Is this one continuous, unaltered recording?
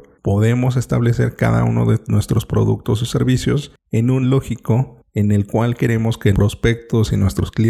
no; 2 cuts; at 4.2 s, 6.3 s

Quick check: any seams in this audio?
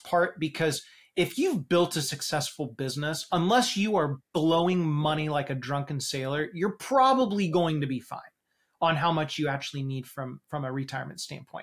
no; 0 cuts

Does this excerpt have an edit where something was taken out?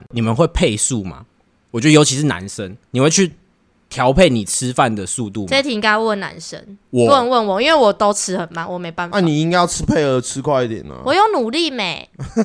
yes; 1 cut; at 2.9 s

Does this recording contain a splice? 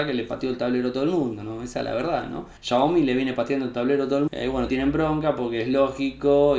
yes; 3 cuts; at 2.6 s, 4.3 s, 4.7 s

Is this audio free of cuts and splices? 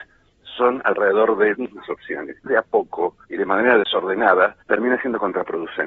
no; 4 cuts; at 1.5 s, 2.5 s, 3.2 s, 4.6 s

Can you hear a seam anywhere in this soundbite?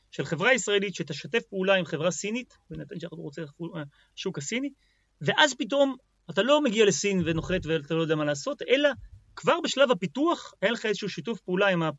no; 0 cuts

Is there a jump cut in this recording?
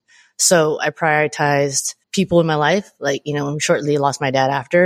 yes; 1 cut; at 2.0 s

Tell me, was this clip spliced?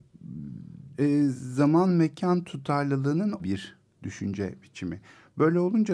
yes; 2 cuts; at 0.9 s, 3.4 s

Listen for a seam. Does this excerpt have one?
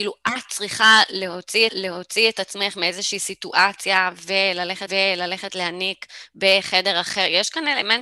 yes; 2 cuts; at 1.7 s, 4.9 s

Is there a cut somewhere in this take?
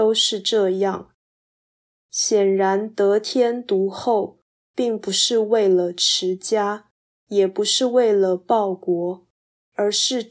no; 0 cuts

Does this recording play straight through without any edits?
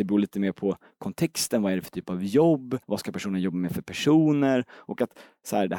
no; 1 cut; at 2.8 s

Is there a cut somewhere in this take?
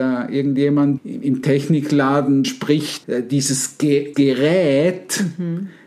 yes; 4 cuts; at 1.0 s, 2.4 s, 3.0 s, 4.1 s

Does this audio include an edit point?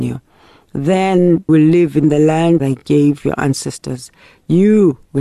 yes; 2 cuts; at 1.5 s, 2.6 s

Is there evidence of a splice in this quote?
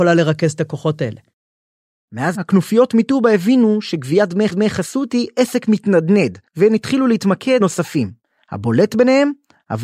yes; 4 cuts; at 2.3 s, 4.5 s, 6.5 s, 7.6 s

